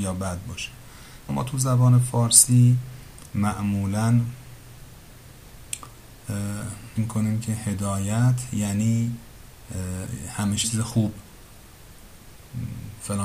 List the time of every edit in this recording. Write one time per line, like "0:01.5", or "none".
0:01.3
0:07.0
0:10.6